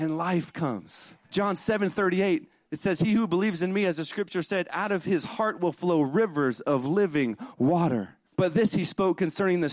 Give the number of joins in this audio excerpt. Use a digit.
2